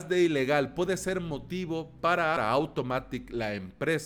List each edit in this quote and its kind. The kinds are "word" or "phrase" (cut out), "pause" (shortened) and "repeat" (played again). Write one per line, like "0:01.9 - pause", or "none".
0:02.4 - word